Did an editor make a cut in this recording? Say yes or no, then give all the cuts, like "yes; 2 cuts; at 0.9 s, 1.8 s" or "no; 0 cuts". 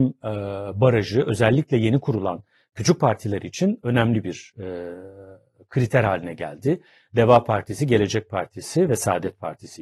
no; 0 cuts